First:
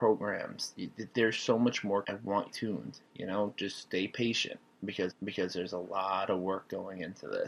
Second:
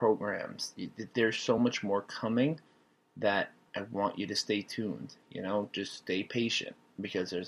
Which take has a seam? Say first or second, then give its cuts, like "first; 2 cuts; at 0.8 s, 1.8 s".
first; 3 cuts; at 2.0 s, 2.5 s, 5.1 s